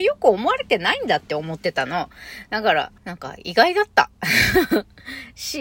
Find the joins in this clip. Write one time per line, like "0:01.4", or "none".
0:03.0